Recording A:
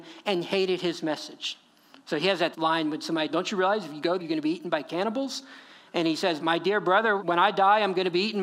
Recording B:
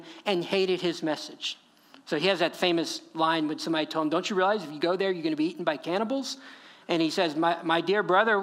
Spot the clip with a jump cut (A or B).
A